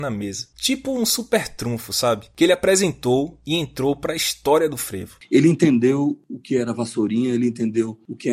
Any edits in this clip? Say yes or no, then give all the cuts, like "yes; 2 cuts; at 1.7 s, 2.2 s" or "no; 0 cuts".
no; 0 cuts